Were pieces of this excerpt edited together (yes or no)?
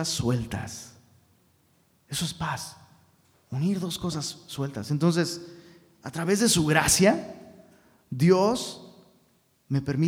no